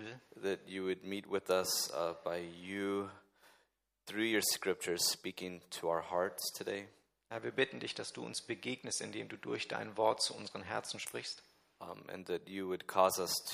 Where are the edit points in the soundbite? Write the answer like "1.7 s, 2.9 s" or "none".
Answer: none